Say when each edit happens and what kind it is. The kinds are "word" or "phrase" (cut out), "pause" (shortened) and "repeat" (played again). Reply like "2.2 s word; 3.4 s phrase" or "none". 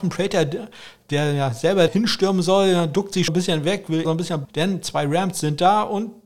1.9 s phrase; 3.3 s phrase; 4.0 s word; 4.4 s word